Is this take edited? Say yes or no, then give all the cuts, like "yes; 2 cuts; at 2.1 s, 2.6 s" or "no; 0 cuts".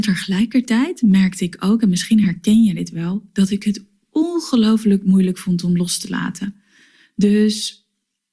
no; 0 cuts